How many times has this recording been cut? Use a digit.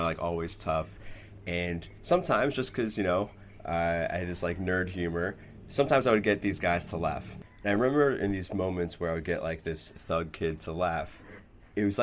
0